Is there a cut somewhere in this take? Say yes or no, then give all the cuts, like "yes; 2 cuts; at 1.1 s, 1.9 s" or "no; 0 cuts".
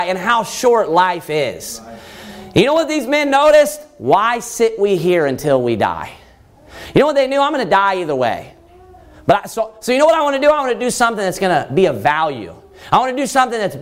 no; 0 cuts